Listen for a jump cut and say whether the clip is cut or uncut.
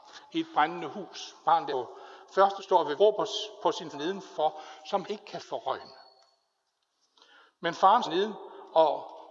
cut